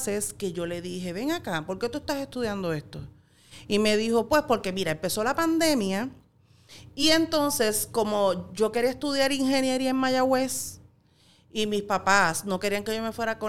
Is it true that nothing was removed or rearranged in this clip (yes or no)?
yes